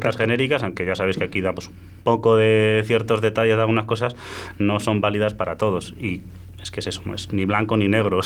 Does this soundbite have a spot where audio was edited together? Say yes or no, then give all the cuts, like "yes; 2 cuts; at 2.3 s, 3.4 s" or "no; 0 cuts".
no; 0 cuts